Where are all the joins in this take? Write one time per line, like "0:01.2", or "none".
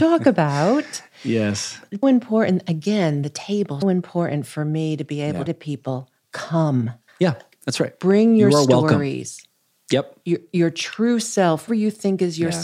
0:02.0
0:03.8
0:05.5
0:11.7